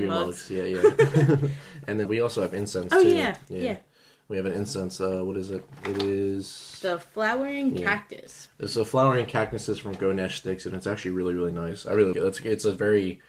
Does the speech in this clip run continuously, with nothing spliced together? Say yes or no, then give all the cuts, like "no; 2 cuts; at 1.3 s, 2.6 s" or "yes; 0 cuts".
no; 2 cuts; at 2.0 s, 12.1 s